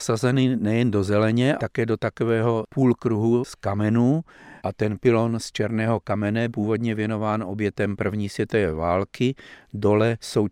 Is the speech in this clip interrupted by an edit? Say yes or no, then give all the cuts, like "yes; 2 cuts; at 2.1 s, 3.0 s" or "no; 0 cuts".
yes; 3 cuts; at 1.6 s, 4.6 s, 6.5 s